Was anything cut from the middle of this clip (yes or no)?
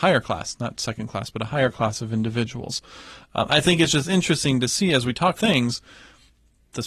yes